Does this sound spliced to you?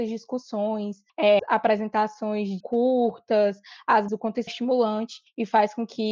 yes; 4 cuts; at 1.4 s, 2.6 s, 4.1 s, 4.5 s

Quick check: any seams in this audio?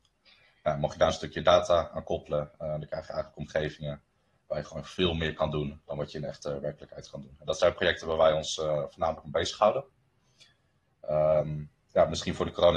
no; 0 cuts

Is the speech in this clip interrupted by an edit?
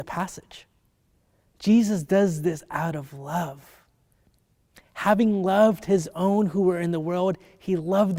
no; 0 cuts

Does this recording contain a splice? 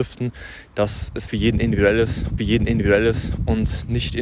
yes; 2 cuts; at 1.3 s, 2.4 s

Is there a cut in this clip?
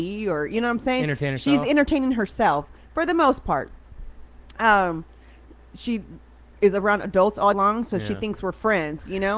yes; 1 cut; at 7.5 s

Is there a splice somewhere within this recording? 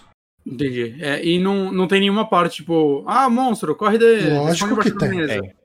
no; 0 cuts

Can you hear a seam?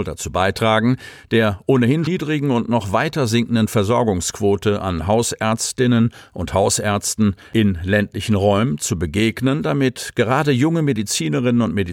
yes; 1 cut; at 2.1 s

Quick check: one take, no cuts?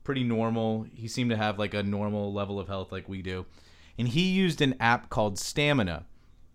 yes; 0 cuts

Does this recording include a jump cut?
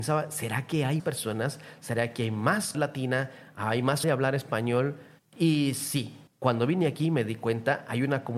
yes; 5 cuts; at 1.0 s, 2.7 s, 4.0 s, 5.2 s, 6.3 s

